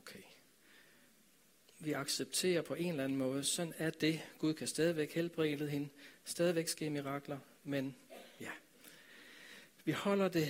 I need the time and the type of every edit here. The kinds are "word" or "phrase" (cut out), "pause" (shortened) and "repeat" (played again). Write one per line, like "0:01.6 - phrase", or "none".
none